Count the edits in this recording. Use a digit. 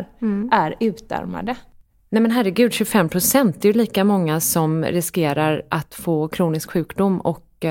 0